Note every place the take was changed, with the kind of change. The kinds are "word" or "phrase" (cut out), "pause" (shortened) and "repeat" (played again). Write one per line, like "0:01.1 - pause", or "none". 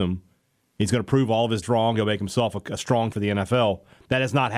0:01.6 - word
0:03.1 - word